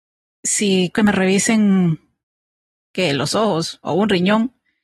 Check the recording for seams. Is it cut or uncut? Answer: cut